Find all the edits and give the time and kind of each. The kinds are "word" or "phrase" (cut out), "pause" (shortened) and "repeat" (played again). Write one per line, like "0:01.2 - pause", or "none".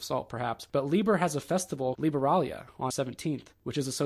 0:01.9 - word
0:02.9 - word